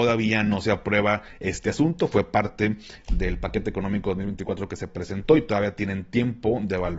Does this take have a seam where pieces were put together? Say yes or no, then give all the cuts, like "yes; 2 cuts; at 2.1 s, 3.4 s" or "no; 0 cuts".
no; 0 cuts